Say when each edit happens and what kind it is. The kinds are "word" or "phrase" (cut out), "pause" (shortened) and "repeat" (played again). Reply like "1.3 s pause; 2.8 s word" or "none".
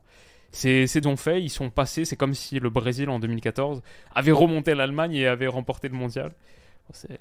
1.0 s phrase; 4.1 s phrase